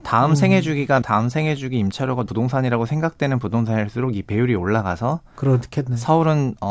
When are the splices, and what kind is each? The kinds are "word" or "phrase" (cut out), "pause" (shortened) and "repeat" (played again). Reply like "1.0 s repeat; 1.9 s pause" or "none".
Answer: 1.0 s word; 2.3 s word